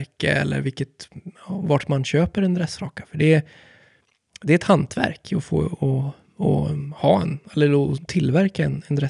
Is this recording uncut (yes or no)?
yes